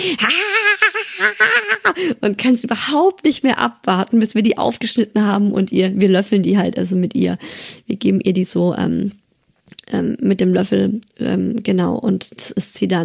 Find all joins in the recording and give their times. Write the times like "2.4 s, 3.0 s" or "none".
none